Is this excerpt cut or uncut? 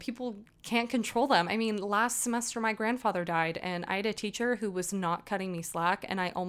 uncut